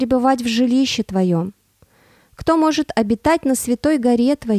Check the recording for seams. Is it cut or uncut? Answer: uncut